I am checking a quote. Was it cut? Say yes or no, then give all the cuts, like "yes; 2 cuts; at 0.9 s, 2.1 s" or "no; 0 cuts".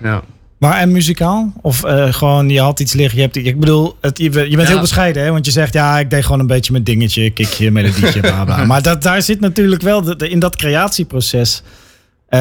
no; 0 cuts